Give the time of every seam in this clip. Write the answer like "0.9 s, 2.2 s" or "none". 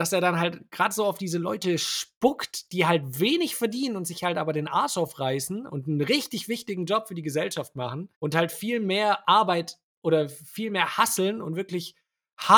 8.1 s